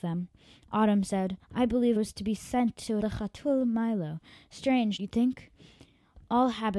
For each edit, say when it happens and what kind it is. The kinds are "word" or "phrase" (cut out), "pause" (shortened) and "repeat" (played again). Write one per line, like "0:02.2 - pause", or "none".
0:01.4 - pause
0:02.0 - word
0:03.0 - phrase
0:05.0 - word